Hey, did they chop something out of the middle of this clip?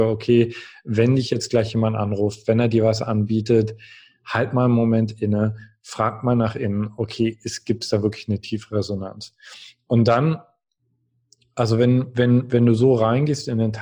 no; 0 cuts

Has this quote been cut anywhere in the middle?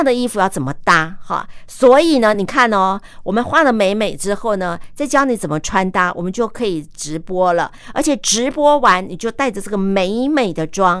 no; 0 cuts

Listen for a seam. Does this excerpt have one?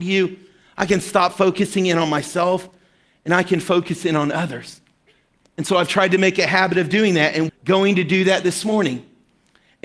yes; 1 cut; at 7.5 s

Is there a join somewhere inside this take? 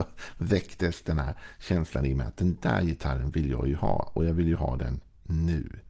no; 0 cuts

